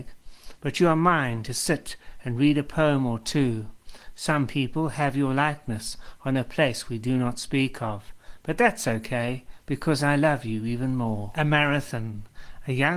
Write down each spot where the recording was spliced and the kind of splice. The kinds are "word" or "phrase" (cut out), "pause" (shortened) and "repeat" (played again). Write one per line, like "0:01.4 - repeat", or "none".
none

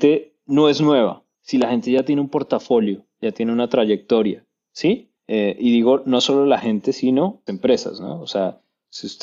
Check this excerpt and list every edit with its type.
0:07.5 - word

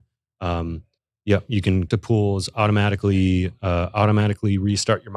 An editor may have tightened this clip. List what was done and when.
0:01.0 - pause
0:01.9 - word

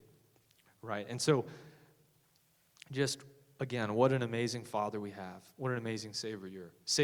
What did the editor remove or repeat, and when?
none

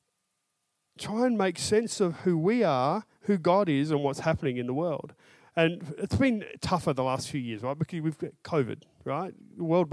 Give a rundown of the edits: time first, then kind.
none

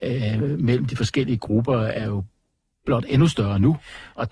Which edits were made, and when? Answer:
none

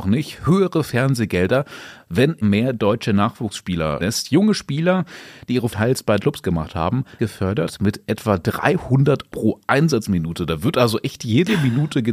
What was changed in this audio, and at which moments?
0:02.4 - word
0:04.0 - word
0:05.7 - word
0:06.2 - word
0:07.2 - word
0:09.3 - word

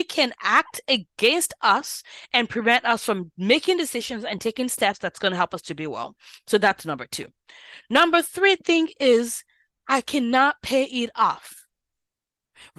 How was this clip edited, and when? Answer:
none

